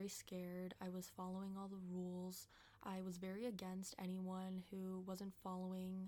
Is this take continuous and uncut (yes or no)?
yes